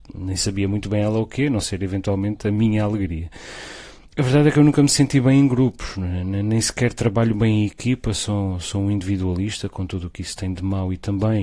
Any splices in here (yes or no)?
no